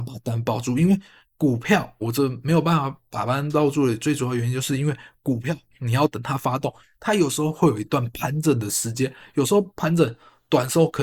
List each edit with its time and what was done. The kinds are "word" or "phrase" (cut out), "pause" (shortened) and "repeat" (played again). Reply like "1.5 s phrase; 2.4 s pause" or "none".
2.0 s word